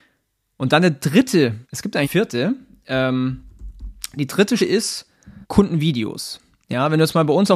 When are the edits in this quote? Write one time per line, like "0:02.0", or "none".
0:01.6
0:02.0
0:04.6
0:05.4